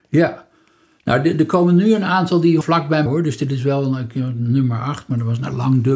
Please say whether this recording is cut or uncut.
cut